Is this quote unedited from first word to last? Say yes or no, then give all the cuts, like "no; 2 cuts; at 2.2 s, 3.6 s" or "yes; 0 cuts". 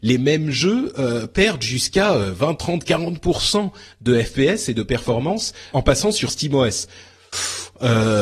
no; 1 cut; at 5.7 s